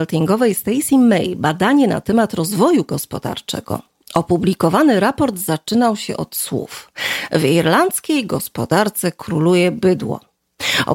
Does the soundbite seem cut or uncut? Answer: uncut